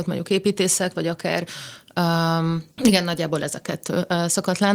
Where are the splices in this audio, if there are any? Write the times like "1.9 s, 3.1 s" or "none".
2.7 s